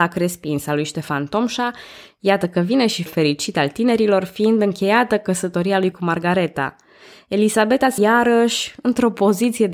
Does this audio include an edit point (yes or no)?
yes